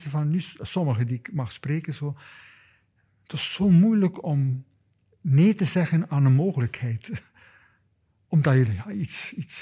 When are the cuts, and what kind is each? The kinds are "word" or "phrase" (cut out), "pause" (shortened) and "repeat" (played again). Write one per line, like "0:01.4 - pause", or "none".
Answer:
0:08.7 - word